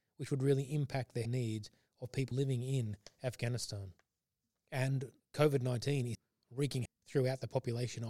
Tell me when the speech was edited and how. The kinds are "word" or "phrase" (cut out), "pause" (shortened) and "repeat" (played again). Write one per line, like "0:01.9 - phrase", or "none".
0:01.3 - word
0:02.3 - word
0:05.2 - word
0:06.1 - word
0:06.9 - word